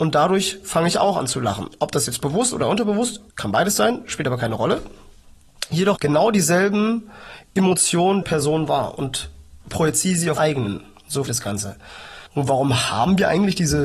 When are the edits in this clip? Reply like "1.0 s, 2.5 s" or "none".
2.5 s, 3.3 s, 6.0 s, 8.2 s, 9.6 s, 10.4 s, 11.3 s, 12.3 s

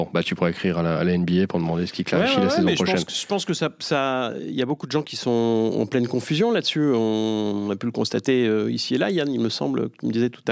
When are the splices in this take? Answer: none

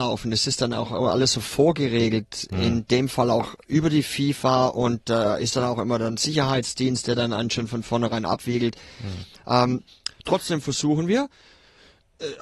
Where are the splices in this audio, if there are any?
none

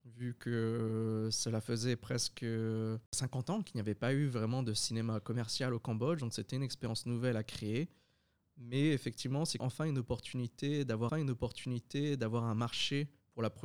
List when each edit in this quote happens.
9.6 s, 11.1 s

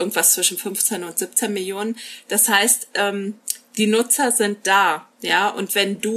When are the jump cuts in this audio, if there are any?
none

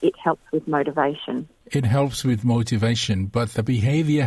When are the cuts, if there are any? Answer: 1.6 s

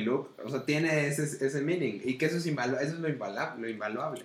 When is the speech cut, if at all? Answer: none

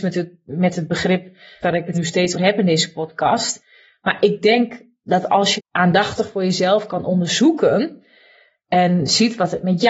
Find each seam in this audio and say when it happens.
1.6 s, 1.9 s, 2.3 s, 5.6 s

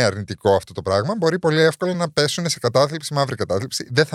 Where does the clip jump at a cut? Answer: none

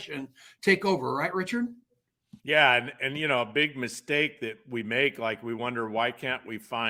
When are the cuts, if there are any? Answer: 2.4 s

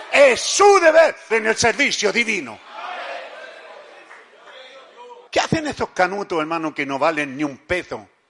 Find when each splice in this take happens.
1.3 s, 5.3 s

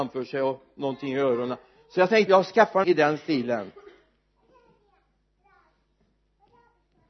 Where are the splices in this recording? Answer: 2.3 s, 2.8 s

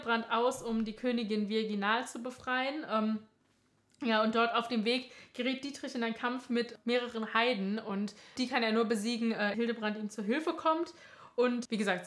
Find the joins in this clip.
9.5 s

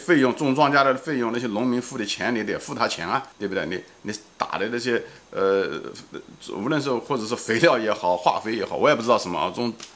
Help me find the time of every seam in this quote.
3.3 s

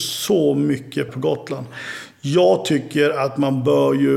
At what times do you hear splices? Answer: 1.1 s

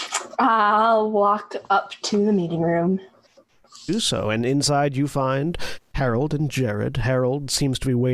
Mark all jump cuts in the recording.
none

